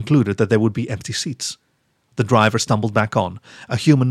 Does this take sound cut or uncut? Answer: uncut